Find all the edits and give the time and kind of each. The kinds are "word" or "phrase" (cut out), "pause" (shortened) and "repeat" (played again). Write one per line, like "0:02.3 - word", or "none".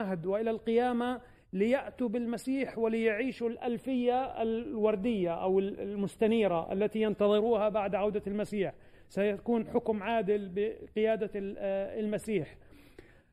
none